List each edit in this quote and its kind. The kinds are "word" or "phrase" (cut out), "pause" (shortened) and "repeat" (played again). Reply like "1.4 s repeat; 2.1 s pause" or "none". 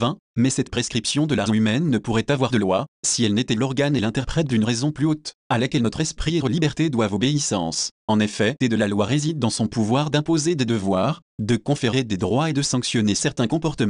1.5 s word; 2.5 s word; 6.4 s word; 8.6 s word